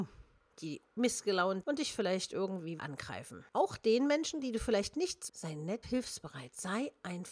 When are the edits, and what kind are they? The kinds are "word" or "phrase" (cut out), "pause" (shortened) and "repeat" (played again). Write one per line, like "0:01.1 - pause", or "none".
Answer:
0:01.6 - word
0:02.8 - word
0:04.4 - word
0:05.3 - word
0:05.8 - word